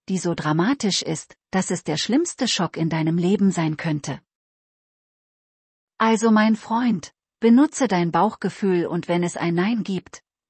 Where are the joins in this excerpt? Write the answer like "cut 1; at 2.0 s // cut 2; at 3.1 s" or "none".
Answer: none